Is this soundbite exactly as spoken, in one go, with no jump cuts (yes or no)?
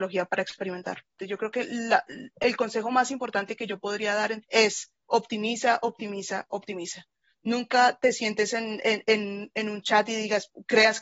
no